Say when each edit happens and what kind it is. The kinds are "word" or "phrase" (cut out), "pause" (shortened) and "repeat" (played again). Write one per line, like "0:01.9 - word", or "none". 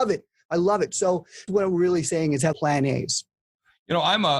0:01.5 - word
0:02.5 - word